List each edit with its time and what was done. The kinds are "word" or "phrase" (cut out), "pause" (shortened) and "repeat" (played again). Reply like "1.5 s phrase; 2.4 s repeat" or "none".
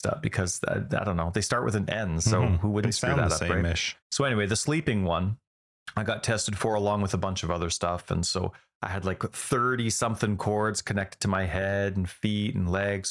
4.0 s pause